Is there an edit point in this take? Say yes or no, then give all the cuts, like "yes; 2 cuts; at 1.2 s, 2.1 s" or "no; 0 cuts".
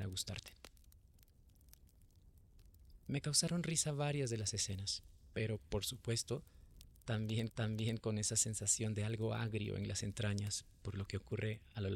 yes; 1 cut; at 7.5 s